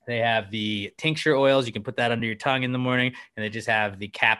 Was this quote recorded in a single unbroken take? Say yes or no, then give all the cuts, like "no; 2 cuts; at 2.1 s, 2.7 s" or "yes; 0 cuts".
yes; 0 cuts